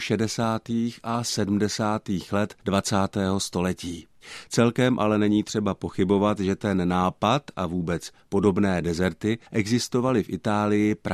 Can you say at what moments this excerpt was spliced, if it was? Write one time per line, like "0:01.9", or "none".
0:02.6
0:09.4

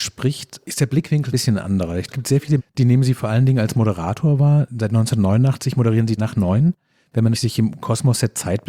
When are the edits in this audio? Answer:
0:01.3
0:02.1
0:02.6
0:06.2
0:07.3

